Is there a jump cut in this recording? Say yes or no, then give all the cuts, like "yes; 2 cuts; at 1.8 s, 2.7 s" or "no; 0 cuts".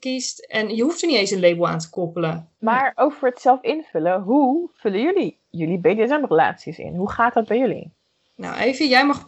no; 0 cuts